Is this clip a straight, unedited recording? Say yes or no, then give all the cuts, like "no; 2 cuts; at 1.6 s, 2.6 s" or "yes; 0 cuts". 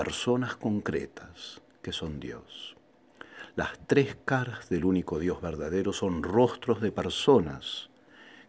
yes; 0 cuts